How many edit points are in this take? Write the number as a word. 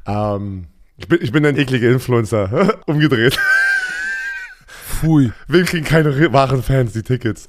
three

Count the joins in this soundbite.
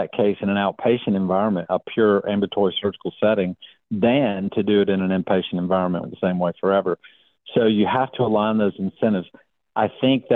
one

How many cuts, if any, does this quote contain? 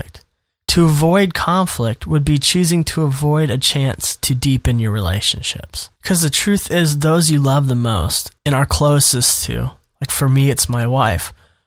two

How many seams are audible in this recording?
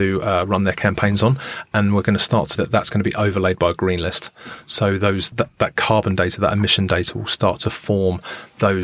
two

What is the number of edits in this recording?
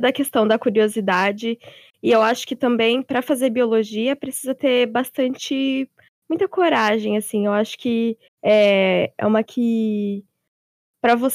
two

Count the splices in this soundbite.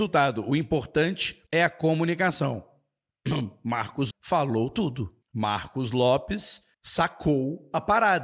four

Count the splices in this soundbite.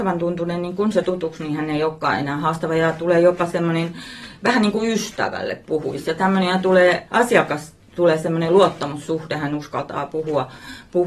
two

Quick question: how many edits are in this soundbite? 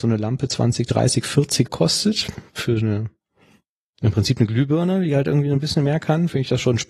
one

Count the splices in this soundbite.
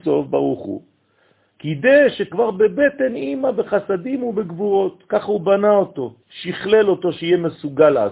two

